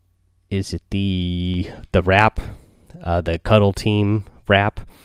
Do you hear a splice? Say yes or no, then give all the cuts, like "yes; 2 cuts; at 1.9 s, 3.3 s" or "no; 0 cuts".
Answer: no; 0 cuts